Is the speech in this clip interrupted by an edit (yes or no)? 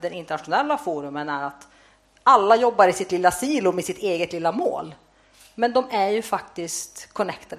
no